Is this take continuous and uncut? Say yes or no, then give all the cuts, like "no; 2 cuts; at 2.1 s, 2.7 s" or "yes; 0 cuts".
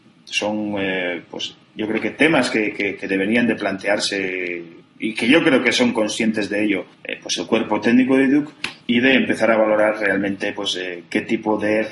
no; 3 cuts; at 4.8 s, 6.9 s, 8.8 s